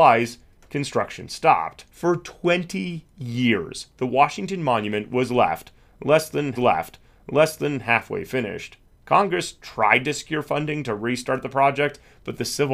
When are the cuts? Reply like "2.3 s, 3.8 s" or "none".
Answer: 1.9 s, 6.5 s, 8.9 s